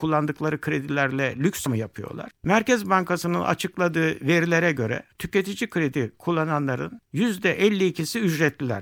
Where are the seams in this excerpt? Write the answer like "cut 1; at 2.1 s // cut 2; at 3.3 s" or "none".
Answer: cut 1; at 1.7 s

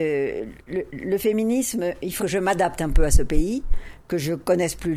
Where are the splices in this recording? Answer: cut 1; at 2.2 s

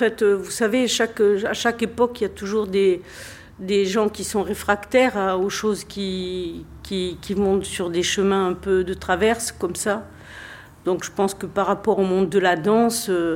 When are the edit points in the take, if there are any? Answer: none

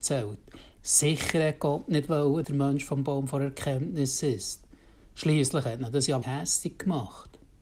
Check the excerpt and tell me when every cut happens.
cut 1; at 2.4 s // cut 2; at 6.2 s

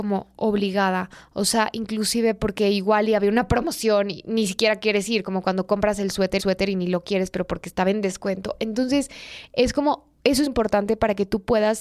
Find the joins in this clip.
cut 1; at 6.4 s // cut 2; at 10.5 s

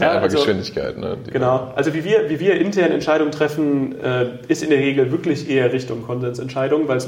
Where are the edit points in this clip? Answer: none

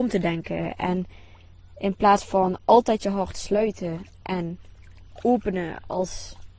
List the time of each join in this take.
none

